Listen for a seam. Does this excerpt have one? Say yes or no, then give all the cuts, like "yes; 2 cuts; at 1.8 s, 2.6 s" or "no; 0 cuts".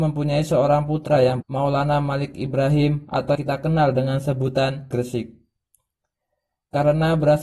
yes; 3 cuts; at 1.4 s, 3.3 s, 4.9 s